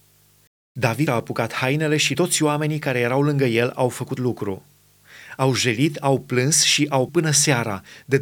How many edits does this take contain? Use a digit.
4